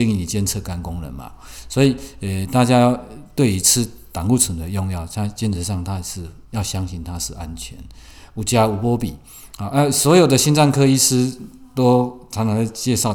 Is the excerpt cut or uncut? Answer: cut